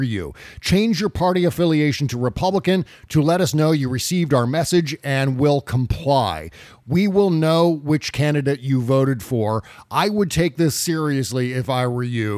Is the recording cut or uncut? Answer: uncut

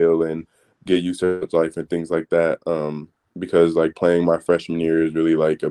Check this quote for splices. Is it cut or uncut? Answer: uncut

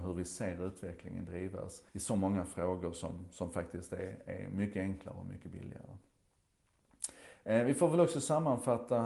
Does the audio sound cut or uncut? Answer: cut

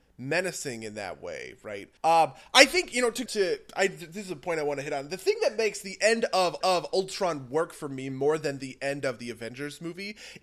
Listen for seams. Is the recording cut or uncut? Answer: cut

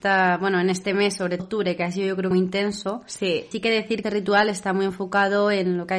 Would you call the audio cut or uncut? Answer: cut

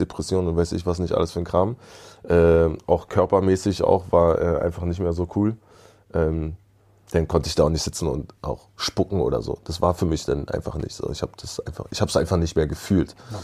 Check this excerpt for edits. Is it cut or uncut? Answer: uncut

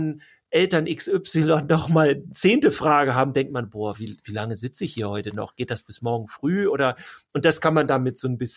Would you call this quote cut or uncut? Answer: uncut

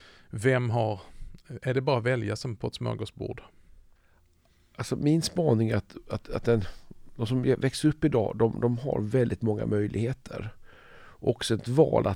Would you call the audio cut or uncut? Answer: uncut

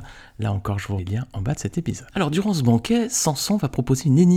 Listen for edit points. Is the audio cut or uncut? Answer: cut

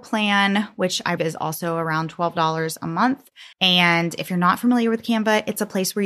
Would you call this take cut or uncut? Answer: cut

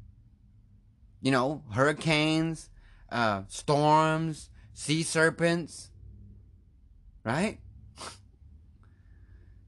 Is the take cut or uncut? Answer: uncut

